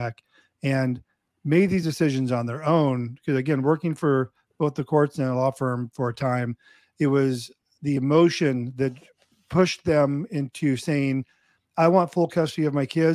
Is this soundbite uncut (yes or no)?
yes